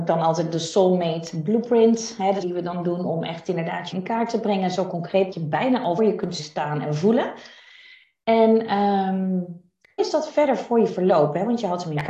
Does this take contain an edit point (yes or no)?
yes